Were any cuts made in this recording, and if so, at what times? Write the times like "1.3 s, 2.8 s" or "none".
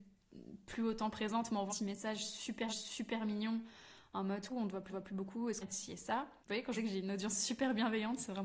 1.7 s, 2.7 s, 4.5 s, 4.9 s, 5.6 s, 6.4 s, 6.8 s